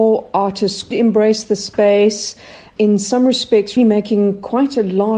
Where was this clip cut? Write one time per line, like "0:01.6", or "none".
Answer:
0:00.9
0:02.8
0:03.8